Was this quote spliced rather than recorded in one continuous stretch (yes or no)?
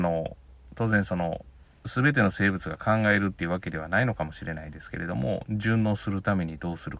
no